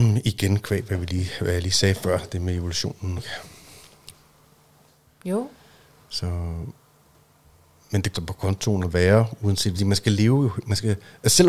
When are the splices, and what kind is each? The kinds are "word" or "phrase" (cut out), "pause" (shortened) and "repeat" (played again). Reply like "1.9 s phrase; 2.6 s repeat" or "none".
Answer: 3.2 s phrase; 8.1 s phrase; 9.7 s word